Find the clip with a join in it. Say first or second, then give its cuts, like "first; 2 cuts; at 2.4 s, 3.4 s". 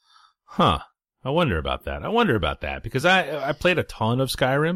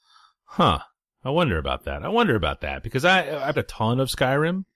second; 1 cut; at 3.5 s